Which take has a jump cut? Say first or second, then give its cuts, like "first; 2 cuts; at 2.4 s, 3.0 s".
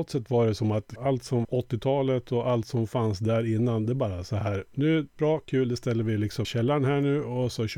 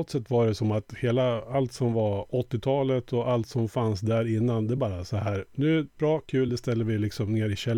first; 3 cuts; at 1.0 s, 1.4 s, 6.4 s